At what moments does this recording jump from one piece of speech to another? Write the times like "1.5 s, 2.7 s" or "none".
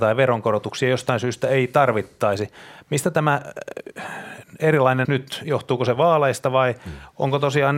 5.1 s